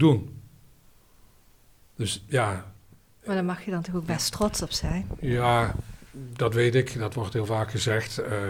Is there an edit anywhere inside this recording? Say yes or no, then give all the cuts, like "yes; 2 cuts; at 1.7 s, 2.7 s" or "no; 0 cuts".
no; 0 cuts